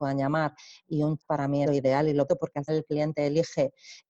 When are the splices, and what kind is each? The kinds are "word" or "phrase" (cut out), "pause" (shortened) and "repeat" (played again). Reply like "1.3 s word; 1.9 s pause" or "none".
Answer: 1.2 s word; 1.6 s phrase; 2.3 s word; 2.7 s word